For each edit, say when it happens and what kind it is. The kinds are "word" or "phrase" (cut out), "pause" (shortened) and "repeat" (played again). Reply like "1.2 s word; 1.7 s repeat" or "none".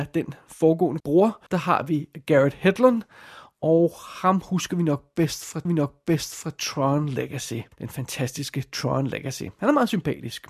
1.0 s word; 1.5 s pause; 5.6 s repeat; 7.7 s pause